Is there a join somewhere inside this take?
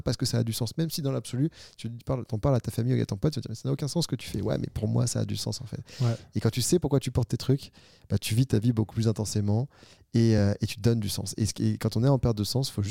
no; 0 cuts

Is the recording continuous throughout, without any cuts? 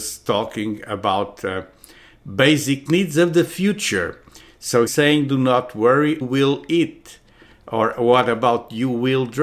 no; 3 cuts; at 2.9 s, 4.9 s, 6.2 s

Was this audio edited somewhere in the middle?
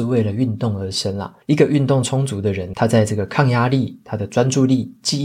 yes; 2 cuts; at 1.4 s, 2.7 s

